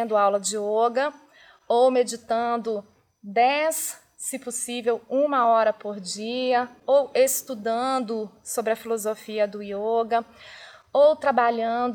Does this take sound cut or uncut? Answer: uncut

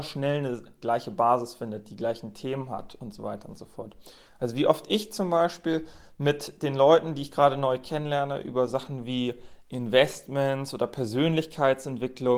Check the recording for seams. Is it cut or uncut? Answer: cut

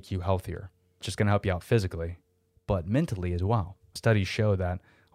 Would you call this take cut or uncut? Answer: cut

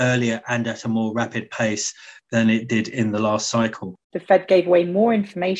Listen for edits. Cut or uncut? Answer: cut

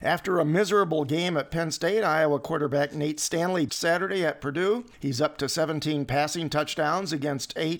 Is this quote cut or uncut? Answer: cut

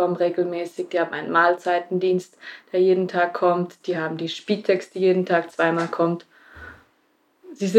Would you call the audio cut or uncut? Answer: uncut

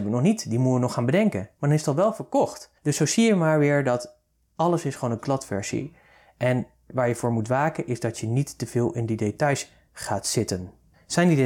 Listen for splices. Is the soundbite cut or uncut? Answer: cut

